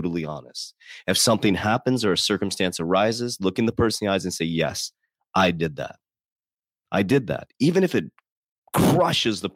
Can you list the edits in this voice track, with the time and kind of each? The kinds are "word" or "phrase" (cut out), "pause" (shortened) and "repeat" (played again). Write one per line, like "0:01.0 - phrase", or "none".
none